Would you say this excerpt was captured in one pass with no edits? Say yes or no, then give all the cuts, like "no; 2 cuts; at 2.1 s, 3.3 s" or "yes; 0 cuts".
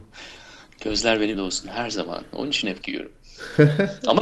no; 2 cuts; at 1.3 s, 2.8 s